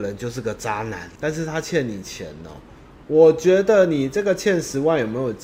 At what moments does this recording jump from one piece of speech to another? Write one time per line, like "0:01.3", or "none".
0:01.2